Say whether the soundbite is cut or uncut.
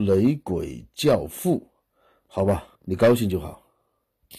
cut